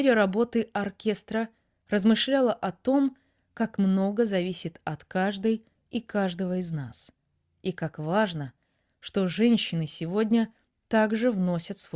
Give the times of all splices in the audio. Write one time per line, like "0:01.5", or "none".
none

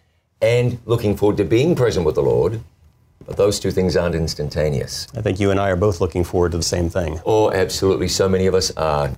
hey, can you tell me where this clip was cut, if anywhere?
0:06.6

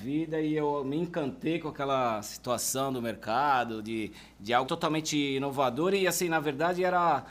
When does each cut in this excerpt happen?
0:04.6

